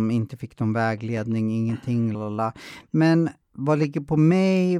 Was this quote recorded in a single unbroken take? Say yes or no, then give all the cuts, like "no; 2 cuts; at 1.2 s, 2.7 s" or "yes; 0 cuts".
no; 2 cuts; at 2.1 s, 3.4 s